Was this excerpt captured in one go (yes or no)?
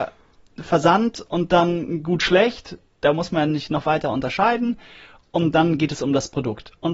yes